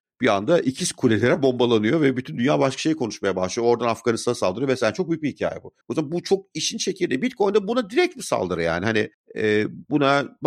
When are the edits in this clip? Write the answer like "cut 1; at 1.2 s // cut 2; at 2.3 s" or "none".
cut 1; at 5.8 s // cut 2; at 9.1 s